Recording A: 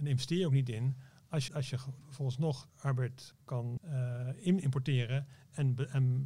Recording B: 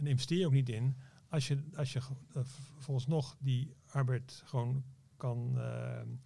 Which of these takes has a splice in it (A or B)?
A